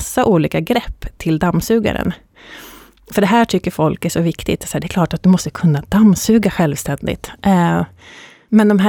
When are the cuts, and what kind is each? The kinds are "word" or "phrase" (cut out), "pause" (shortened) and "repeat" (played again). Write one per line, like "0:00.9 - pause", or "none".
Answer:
none